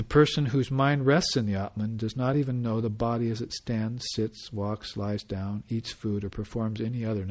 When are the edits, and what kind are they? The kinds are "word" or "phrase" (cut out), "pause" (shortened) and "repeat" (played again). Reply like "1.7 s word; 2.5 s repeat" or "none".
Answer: none